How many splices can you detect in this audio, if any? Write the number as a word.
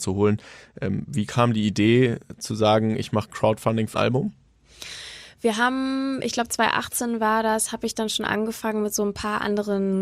one